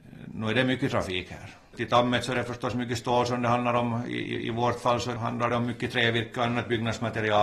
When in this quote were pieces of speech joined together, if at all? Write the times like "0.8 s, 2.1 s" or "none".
none